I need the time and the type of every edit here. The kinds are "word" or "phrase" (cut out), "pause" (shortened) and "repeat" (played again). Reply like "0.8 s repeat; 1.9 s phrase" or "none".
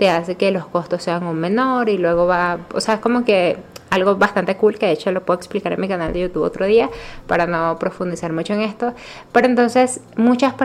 none